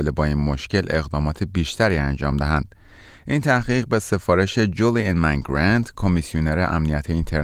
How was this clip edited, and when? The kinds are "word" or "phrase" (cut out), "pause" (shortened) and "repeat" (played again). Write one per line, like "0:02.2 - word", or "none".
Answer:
none